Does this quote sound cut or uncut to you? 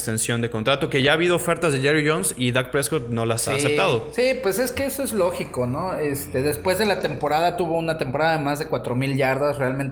uncut